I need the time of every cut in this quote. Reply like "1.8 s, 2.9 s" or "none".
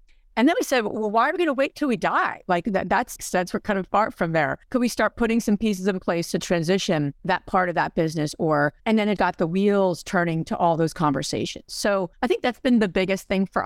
3.2 s, 4.6 s, 7.2 s, 8.8 s, 9.2 s, 12.1 s